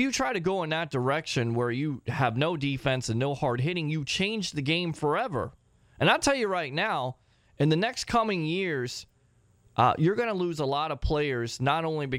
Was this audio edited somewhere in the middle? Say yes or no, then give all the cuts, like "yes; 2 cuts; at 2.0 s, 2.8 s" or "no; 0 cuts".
no; 0 cuts